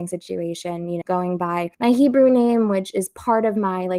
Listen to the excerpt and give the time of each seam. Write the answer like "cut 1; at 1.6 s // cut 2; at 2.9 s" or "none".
cut 1; at 1.0 s // cut 2; at 1.7 s